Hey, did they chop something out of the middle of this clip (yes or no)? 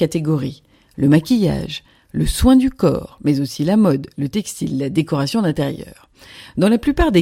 no